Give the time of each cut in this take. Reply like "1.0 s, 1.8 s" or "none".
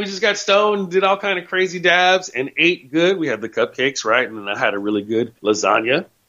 5.4 s